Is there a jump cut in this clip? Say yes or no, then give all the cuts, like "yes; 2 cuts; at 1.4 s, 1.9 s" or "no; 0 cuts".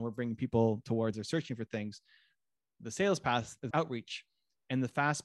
yes; 2 cuts; at 1.1 s, 3.7 s